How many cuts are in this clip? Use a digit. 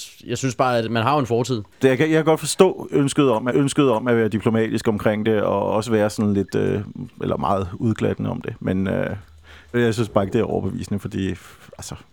3